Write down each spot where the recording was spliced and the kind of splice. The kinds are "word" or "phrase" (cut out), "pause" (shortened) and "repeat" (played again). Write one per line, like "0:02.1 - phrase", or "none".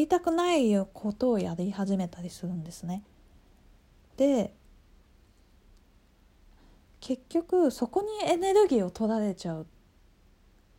none